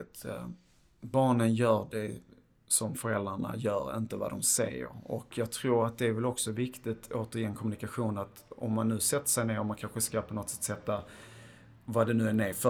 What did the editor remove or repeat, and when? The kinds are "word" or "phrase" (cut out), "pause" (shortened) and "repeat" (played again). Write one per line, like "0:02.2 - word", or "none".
none